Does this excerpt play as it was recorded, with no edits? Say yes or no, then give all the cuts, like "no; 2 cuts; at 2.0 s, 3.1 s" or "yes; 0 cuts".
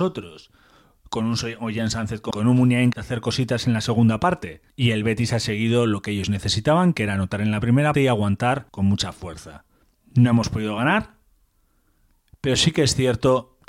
no; 5 cuts; at 2.3 s, 2.9 s, 4.7 s, 7.9 s, 8.7 s